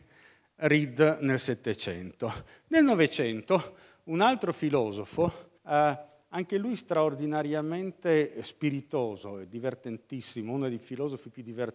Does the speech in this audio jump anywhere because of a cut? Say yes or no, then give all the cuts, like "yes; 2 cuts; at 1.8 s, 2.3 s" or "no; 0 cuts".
yes; 1 cut; at 5.6 s